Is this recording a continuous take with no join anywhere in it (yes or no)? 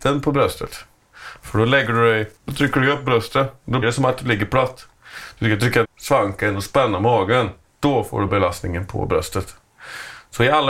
no